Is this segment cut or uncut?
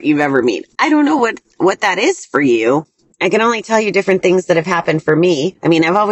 uncut